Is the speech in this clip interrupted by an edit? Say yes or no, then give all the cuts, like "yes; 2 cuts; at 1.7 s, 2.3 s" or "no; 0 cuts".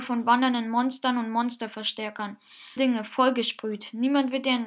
yes; 1 cut; at 2.8 s